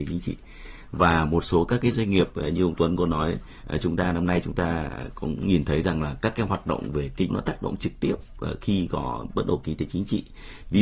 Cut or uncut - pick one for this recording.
cut